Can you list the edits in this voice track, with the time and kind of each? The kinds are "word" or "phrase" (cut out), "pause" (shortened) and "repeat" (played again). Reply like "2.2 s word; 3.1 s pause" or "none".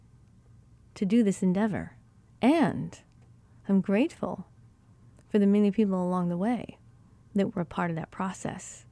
none